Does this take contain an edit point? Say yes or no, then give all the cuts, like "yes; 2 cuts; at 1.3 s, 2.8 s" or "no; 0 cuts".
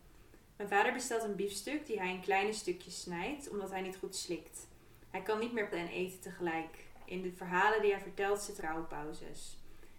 yes; 2 cuts; at 5.7 s, 8.6 s